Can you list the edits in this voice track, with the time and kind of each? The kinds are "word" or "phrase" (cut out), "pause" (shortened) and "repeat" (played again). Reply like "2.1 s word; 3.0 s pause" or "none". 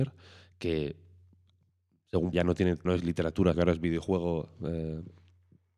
2.3 s word; 2.9 s word; 3.5 s word